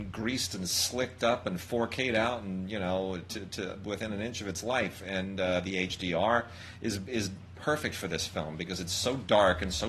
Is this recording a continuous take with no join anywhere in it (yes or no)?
yes